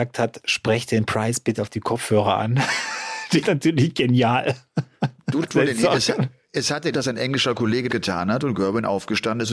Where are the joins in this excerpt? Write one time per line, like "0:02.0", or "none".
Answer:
0:01.6
0:03.4
0:05.4
0:06.9
0:07.9